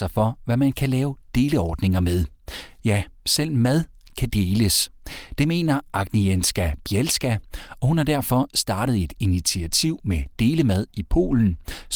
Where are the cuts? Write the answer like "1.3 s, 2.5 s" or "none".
none